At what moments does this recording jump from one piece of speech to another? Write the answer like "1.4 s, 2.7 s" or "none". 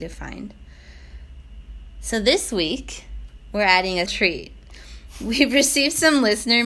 4.1 s